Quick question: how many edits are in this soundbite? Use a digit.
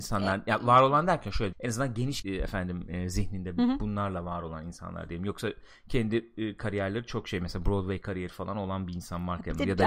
2